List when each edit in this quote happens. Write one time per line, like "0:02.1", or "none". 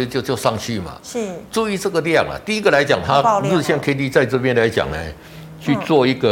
none